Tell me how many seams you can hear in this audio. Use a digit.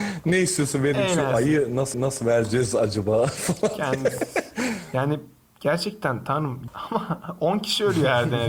2